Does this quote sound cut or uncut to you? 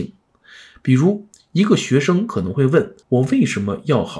cut